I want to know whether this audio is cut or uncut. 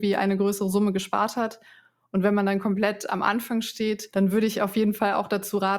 uncut